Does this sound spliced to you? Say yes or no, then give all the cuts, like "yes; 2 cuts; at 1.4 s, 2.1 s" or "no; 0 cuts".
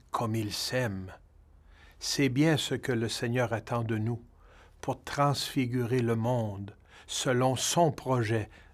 no; 0 cuts